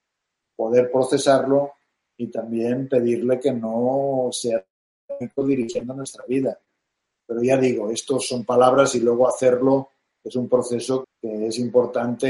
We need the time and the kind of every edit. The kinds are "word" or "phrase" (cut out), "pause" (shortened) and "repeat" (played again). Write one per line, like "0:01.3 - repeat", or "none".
0:11.0 - word